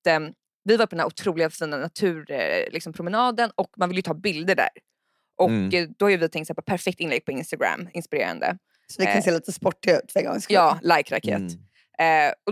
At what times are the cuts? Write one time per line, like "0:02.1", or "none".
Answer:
none